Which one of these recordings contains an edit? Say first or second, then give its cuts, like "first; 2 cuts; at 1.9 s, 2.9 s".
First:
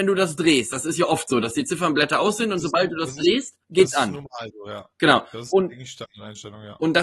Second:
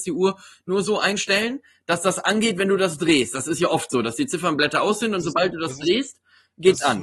first; 1 cut; at 3.6 s